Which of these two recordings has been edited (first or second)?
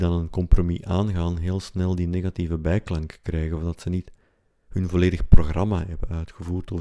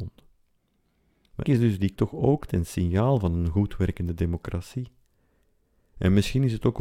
second